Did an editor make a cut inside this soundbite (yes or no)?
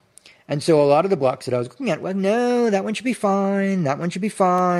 no